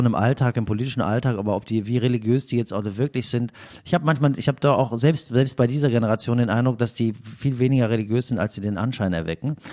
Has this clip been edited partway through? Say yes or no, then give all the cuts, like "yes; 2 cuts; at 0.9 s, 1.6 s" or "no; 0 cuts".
no; 0 cuts